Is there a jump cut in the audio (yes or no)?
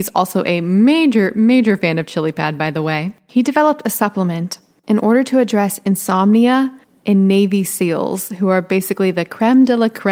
no